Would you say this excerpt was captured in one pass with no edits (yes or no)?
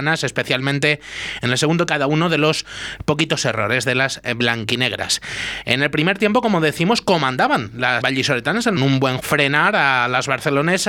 no